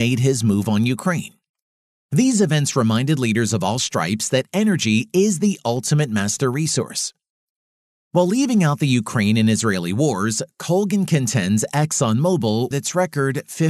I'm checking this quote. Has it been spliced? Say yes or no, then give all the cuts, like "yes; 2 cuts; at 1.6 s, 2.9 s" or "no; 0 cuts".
yes; 1 cut; at 12.7 s